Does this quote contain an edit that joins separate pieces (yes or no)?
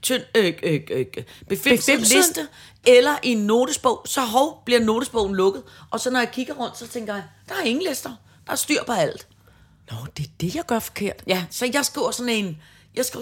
no